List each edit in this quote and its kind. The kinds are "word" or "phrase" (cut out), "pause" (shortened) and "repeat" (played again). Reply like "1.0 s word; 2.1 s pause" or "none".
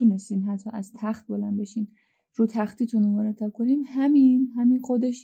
none